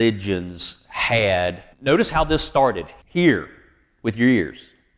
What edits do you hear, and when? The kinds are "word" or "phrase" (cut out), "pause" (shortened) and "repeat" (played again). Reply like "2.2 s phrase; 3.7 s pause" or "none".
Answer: 1.7 s pause; 3.0 s word